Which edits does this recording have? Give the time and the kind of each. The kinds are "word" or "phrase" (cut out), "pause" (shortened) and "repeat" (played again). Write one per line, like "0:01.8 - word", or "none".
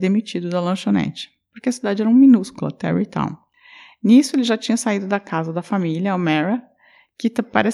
none